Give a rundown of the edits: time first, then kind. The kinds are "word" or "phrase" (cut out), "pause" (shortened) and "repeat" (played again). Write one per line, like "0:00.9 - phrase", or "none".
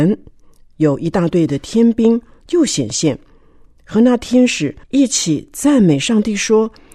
0:04.8 - pause